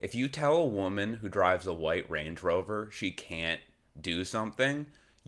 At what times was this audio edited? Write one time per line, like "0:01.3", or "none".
none